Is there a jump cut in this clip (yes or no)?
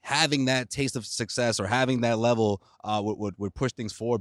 no